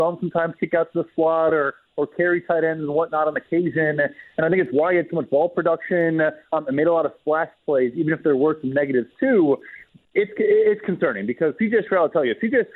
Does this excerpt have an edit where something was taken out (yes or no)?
no